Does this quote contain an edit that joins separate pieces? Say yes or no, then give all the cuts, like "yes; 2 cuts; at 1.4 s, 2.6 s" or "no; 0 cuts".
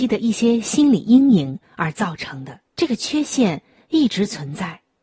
yes; 1 cut; at 2.7 s